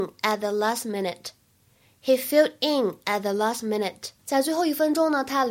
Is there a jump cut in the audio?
no; 0 cuts

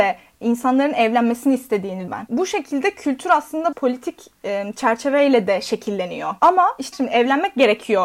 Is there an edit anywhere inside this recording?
yes; 3 cuts; at 2.1 s, 3.7 s, 6.9 s

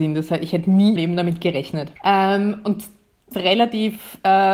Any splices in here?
yes; 3 cuts; at 1.0 s, 2.0 s, 3.3 s

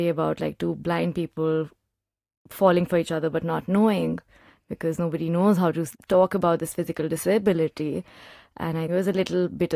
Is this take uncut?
no; 2 cuts; at 5.9 s, 8.9 s

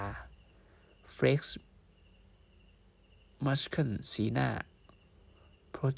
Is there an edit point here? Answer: no; 0 cuts

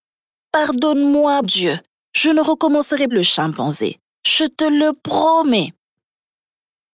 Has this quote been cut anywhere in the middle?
yes; 3 cuts; at 1.4 s, 3.1 s, 4.0 s

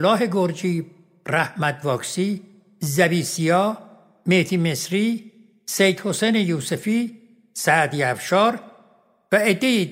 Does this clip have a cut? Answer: no; 0 cuts

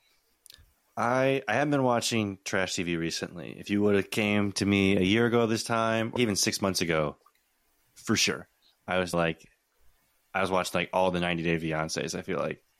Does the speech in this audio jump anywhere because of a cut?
yes; 2 cuts; at 6.2 s, 9.1 s

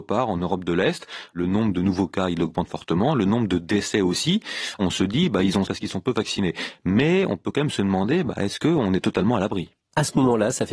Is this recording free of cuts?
no; 1 cut; at 5.7 s

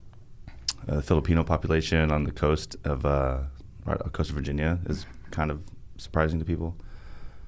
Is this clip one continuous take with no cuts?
yes; 0 cuts

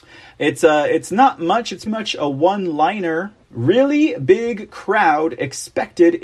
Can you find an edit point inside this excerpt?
yes; 2 cuts; at 1.9 s, 3.4 s

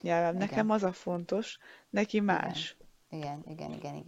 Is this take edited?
no; 0 cuts

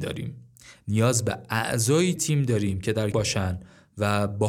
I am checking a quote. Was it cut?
yes; 2 cuts; at 2.2 s, 3.1 s

